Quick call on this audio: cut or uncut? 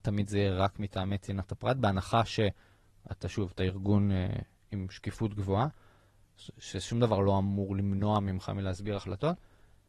uncut